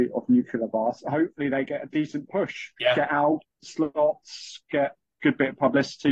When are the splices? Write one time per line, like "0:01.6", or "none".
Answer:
0:02.8
0:03.6